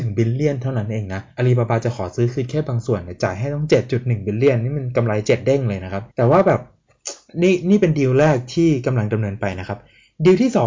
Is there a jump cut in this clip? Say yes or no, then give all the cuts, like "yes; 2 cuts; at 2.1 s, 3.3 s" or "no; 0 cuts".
yes; 2 cuts; at 1.3 s, 6.1 s